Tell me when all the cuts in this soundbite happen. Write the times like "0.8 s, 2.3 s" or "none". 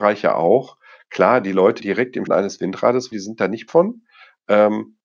1.8 s, 2.3 s, 3.1 s, 3.7 s